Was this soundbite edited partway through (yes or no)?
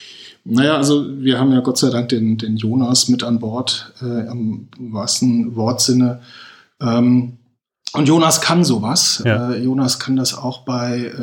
no